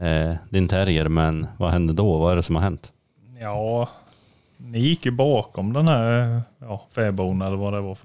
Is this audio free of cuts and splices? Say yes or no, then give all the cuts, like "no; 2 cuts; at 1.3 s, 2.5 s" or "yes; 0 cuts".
yes; 0 cuts